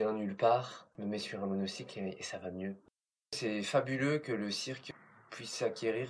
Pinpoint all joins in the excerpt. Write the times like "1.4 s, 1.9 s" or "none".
none